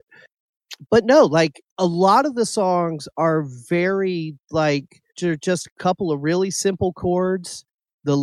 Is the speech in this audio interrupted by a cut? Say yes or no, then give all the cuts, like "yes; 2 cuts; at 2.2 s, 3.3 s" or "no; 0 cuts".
yes; 2 cuts; at 1.7 s, 5.1 s